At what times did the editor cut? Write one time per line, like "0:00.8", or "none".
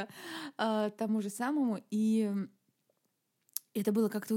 none